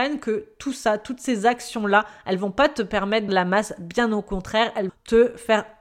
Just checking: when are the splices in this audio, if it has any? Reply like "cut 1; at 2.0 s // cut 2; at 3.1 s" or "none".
cut 1; at 3.3 s // cut 2; at 4.9 s

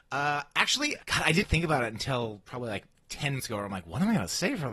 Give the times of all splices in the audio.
cut 1; at 1.0 s // cut 2; at 1.4 s // cut 3; at 3.4 s

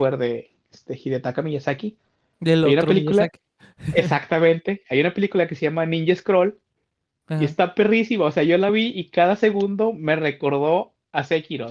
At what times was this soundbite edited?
none

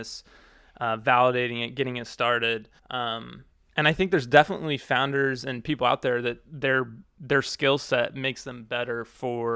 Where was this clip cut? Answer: cut 1; at 2.8 s

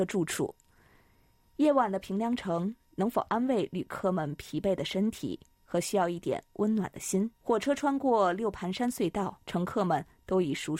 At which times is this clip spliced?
cut 1; at 7.4 s // cut 2; at 9.4 s

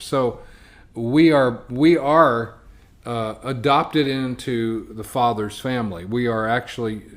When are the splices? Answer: none

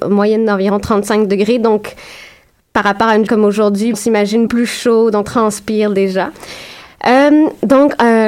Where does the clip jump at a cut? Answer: cut 1; at 3.3 s // cut 2; at 3.9 s // cut 3; at 4.5 s // cut 4; at 5.2 s

